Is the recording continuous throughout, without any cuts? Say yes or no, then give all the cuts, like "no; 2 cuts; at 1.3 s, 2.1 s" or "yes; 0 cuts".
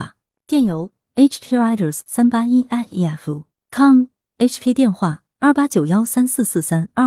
yes; 0 cuts